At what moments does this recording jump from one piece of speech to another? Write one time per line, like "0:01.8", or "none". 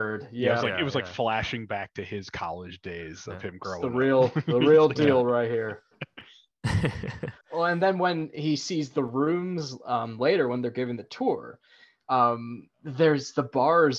0:07.4
0:12.7